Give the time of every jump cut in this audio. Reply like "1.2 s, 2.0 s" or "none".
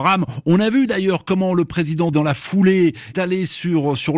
2.1 s, 3.1 s